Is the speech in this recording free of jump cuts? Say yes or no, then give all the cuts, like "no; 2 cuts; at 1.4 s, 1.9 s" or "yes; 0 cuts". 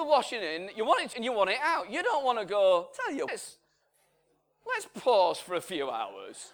no; 2 cuts; at 1.1 s, 3.3 s